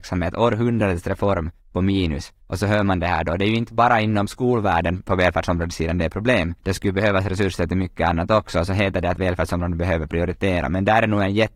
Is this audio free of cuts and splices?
no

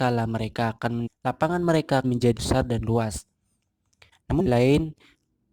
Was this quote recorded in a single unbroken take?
no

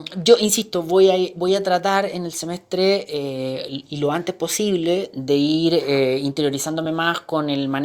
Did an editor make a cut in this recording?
no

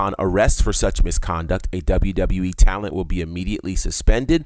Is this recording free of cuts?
yes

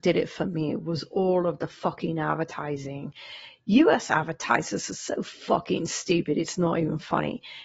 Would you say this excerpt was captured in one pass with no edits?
yes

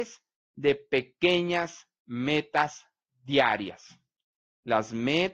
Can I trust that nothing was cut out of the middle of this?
yes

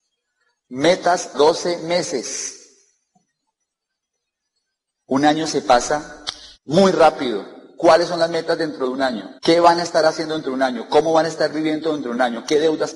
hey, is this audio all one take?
no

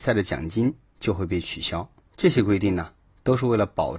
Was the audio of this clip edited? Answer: no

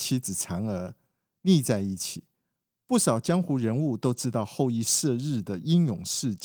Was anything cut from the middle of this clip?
no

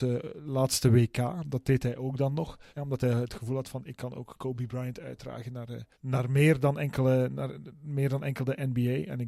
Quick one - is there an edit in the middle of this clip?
yes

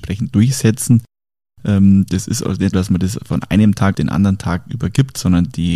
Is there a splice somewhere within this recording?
yes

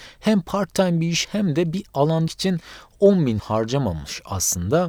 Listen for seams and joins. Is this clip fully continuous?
no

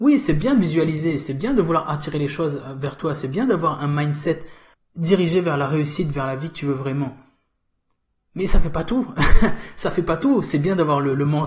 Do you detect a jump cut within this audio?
yes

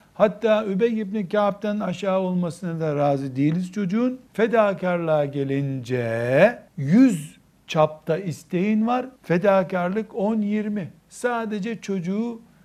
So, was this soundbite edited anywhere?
yes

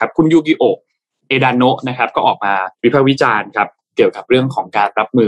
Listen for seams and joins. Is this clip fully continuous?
no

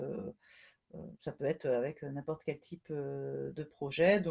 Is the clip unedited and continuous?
no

